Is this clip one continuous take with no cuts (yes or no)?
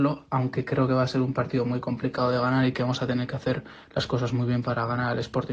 yes